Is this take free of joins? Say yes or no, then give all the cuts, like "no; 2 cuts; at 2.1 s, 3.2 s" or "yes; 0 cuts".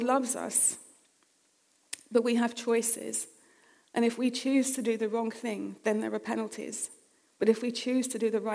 yes; 0 cuts